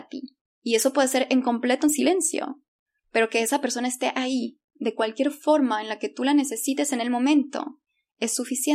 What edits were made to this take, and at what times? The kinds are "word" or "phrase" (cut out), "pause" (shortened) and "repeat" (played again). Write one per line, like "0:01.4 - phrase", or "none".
none